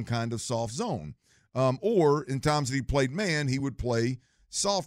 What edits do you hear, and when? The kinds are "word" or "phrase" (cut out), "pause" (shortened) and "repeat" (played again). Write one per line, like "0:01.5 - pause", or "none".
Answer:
none